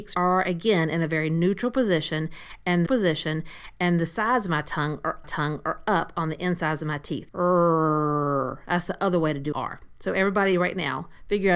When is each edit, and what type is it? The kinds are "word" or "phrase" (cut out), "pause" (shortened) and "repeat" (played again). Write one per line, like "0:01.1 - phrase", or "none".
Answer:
0:02.9 - repeat
0:05.2 - repeat
0:09.5 - word